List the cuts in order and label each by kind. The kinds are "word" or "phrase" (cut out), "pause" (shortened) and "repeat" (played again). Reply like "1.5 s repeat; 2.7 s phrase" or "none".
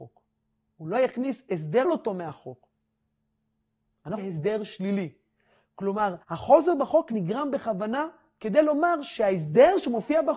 1.8 s phrase; 4.2 s phrase; 6.2 s pause